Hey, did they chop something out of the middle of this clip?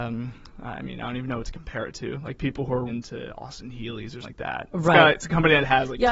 yes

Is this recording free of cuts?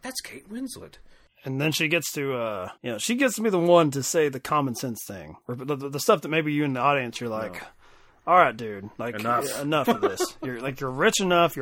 no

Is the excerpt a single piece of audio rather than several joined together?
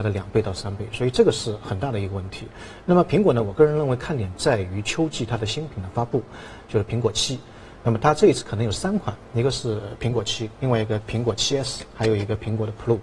yes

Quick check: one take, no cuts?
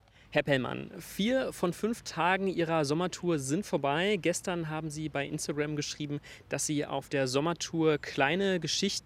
yes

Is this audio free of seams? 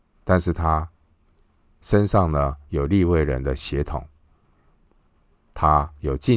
yes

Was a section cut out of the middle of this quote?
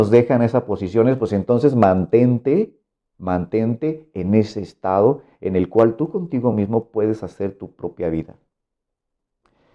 no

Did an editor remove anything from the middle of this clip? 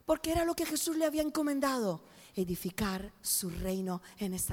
no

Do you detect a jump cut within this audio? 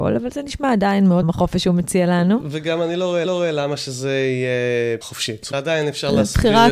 yes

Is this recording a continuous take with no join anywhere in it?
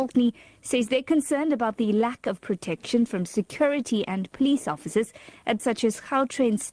no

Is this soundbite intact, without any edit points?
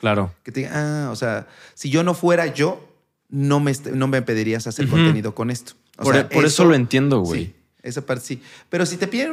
yes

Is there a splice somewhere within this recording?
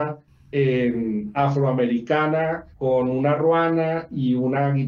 yes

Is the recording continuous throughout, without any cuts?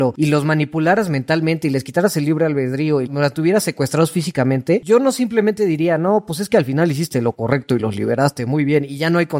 no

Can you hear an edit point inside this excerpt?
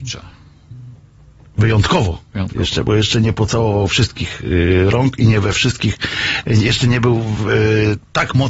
no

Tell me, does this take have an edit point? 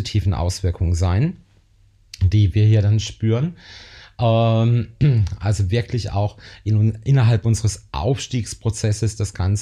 no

